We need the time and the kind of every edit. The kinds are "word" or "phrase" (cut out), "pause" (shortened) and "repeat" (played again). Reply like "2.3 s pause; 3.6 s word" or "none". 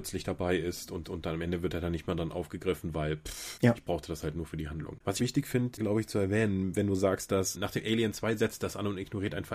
1.0 s repeat; 5.2 s phrase